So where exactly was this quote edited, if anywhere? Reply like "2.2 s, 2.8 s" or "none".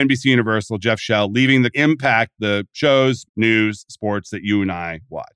1.7 s, 3.3 s